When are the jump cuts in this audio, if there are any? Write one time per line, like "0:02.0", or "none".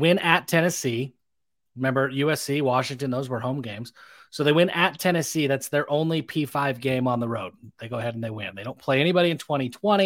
none